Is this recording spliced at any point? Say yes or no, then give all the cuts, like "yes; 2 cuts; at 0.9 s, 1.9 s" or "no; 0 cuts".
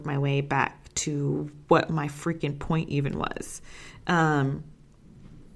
no; 0 cuts